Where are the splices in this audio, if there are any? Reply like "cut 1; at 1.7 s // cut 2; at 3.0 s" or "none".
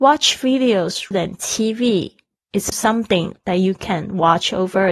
cut 1; at 1.1 s // cut 2; at 2.7 s

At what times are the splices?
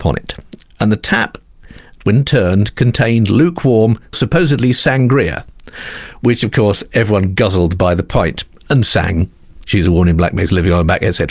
cut 1; at 4.1 s

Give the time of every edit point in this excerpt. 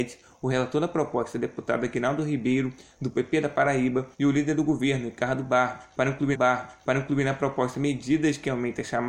cut 1; at 4.1 s // cut 2; at 6.3 s

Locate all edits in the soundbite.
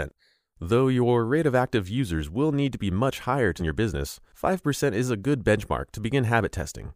cut 1; at 3.6 s

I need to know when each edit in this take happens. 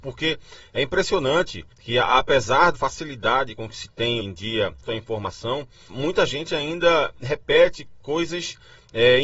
cut 1; at 1.7 s // cut 2; at 2.7 s // cut 3; at 4.2 s // cut 4; at 4.9 s // cut 5; at 5.9 s

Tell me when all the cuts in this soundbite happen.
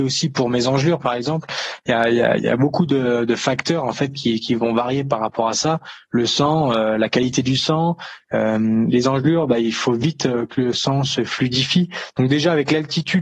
none

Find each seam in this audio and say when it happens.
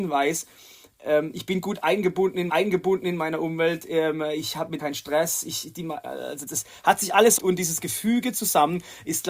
cut 1; at 2.5 s // cut 2; at 4.8 s // cut 3; at 6.5 s // cut 4; at 7.4 s

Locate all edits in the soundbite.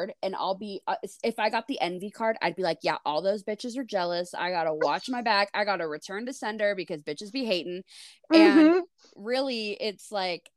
none

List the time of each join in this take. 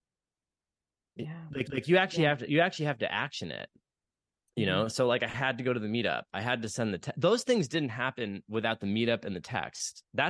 cut 1; at 1.7 s

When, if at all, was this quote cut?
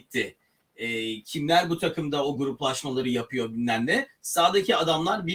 none

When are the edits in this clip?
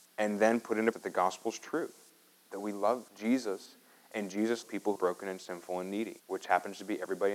cut 1; at 0.9 s // cut 2; at 3.1 s // cut 3; at 4.6 s // cut 4; at 5.0 s // cut 5; at 6.2 s

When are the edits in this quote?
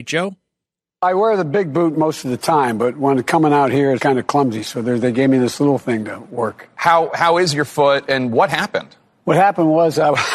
cut 1; at 4.0 s

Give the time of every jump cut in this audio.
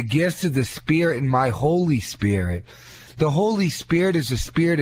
none

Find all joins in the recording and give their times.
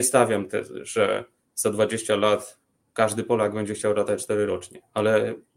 cut 1; at 4.5 s

